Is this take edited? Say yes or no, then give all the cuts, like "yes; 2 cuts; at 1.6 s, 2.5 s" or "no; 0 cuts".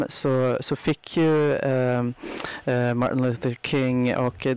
no; 0 cuts